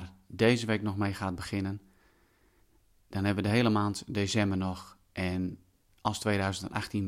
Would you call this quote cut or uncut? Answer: uncut